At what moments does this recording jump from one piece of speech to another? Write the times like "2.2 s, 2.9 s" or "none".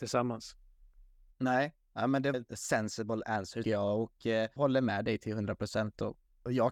2.3 s, 3.6 s, 4.6 s